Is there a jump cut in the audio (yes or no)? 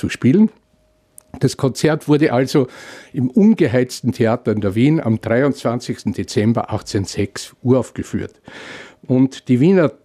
no